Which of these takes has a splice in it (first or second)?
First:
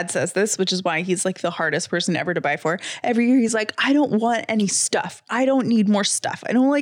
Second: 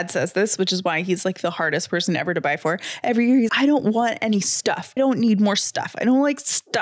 second